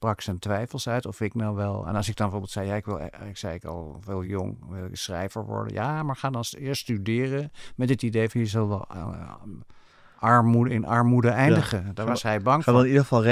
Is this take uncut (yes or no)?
yes